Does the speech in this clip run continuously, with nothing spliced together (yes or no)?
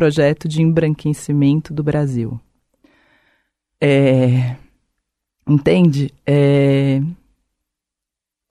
yes